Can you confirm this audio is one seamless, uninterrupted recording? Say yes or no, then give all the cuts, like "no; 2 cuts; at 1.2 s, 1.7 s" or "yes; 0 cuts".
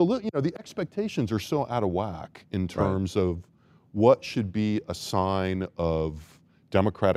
yes; 0 cuts